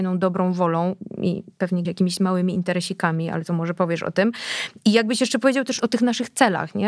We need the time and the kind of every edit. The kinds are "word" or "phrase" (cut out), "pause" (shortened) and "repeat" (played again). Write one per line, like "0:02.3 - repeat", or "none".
0:01.8 - word